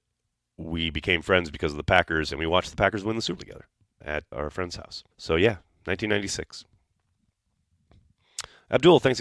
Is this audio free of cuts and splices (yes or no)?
no